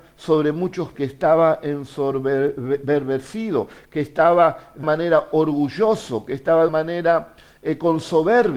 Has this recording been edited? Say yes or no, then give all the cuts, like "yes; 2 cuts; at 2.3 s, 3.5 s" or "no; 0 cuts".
yes; 3 cuts; at 0.9 s, 4.8 s, 6.7 s